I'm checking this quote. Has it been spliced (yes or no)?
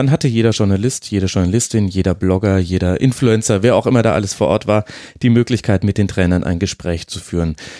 no